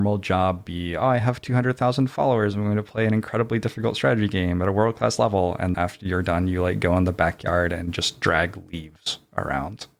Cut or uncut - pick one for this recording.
cut